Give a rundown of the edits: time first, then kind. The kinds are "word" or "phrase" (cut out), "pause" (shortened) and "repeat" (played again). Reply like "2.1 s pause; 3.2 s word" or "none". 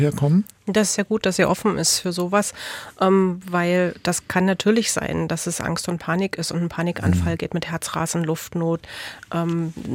none